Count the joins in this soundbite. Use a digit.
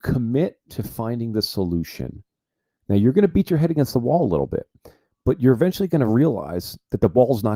0